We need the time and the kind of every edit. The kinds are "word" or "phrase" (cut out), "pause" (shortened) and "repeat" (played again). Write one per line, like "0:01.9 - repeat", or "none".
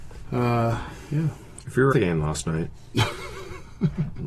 0:01.6 - word
0:01.9 - word